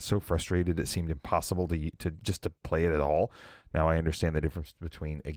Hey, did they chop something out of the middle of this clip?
no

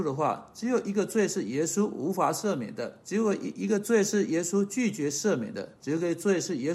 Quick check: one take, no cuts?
no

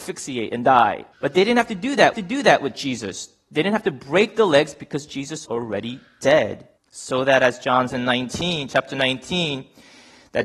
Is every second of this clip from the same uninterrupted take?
no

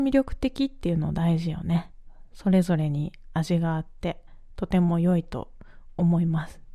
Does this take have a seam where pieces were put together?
no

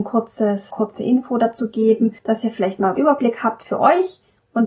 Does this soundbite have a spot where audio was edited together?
yes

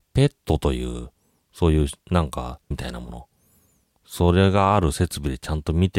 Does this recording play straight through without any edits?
no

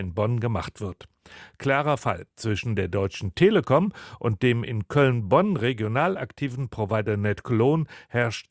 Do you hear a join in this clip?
yes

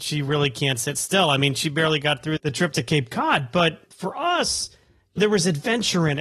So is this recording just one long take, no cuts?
no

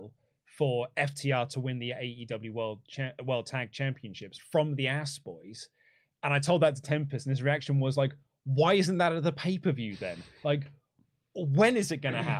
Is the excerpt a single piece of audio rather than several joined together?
yes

